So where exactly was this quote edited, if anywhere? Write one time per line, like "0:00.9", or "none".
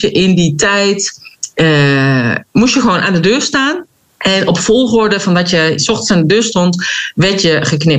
0:04.1